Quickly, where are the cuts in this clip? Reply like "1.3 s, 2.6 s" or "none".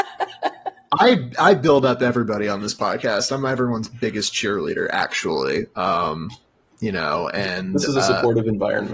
none